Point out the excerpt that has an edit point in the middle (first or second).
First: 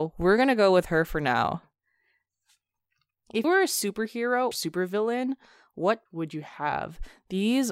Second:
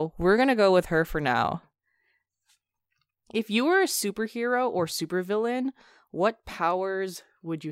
first